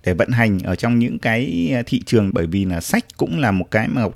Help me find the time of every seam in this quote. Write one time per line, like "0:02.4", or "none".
0:02.3